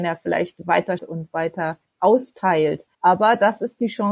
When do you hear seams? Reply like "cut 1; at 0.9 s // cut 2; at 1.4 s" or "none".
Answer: cut 1; at 1.0 s // cut 2; at 2.9 s